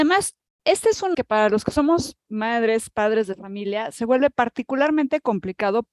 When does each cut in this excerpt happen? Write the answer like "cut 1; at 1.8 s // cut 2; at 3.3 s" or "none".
cut 1; at 1.1 s